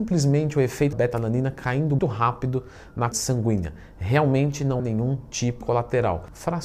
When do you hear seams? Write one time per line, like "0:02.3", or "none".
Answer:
0:00.9
0:02.0
0:03.1
0:04.8
0:05.6